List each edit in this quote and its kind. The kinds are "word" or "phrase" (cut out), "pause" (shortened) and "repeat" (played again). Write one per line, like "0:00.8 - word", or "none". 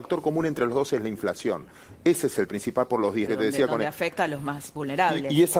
0:02.5 - word
0:03.3 - phrase